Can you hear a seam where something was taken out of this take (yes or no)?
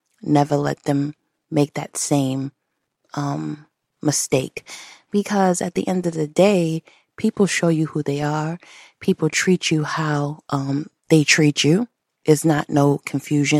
no